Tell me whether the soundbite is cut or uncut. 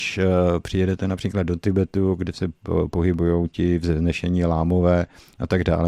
uncut